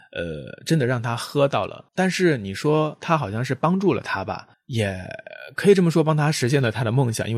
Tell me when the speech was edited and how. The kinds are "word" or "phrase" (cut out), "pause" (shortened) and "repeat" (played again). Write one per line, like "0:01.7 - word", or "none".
0:01.9 - pause
0:04.5 - pause